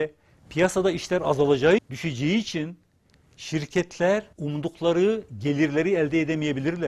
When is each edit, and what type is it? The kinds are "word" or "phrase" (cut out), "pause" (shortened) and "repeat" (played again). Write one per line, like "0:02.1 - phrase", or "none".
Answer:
0:01.8 - word
0:04.3 - pause

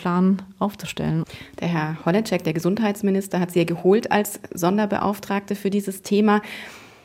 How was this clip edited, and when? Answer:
none

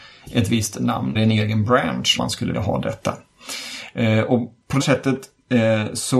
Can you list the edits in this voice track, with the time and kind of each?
0:01.1 - word
0:02.2 - word
0:02.5 - word
0:04.8 - word

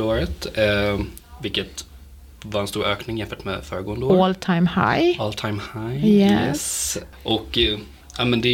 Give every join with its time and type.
none

